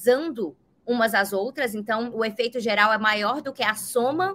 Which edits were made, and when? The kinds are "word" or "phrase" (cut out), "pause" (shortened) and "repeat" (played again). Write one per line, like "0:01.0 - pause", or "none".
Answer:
none